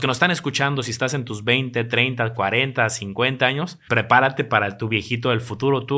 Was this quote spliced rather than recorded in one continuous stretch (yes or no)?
yes